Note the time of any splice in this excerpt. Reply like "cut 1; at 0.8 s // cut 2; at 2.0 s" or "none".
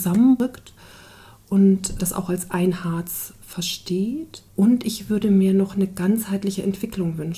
cut 1; at 2.0 s // cut 2; at 4.5 s